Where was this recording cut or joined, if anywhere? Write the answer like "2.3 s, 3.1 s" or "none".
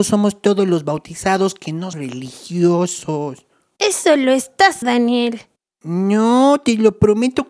1.9 s, 4.8 s